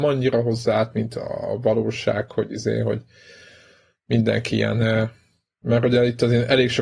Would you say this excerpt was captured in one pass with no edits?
yes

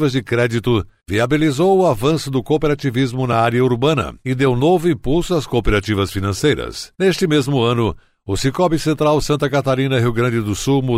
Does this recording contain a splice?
no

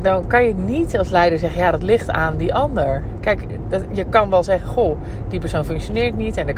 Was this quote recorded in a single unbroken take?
yes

